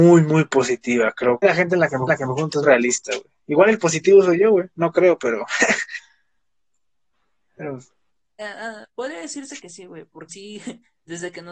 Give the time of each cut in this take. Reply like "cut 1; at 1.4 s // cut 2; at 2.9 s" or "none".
cut 1; at 1.4 s // cut 2; at 2.1 s // cut 3; at 2.6 s // cut 4; at 8.4 s // cut 5; at 10.3 s